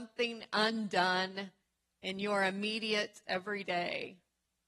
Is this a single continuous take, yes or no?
no